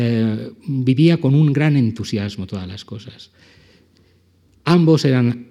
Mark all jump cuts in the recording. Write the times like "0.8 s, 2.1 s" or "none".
none